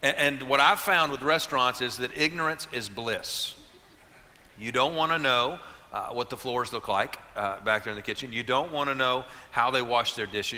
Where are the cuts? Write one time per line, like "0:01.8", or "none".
none